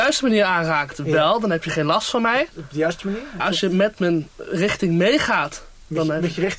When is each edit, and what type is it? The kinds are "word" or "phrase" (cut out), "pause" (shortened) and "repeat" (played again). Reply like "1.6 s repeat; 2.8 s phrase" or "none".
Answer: 3.4 s word